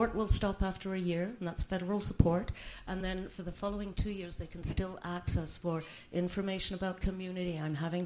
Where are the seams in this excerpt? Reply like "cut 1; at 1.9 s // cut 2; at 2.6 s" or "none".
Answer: none